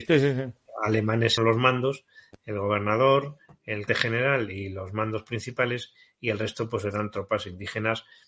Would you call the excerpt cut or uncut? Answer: cut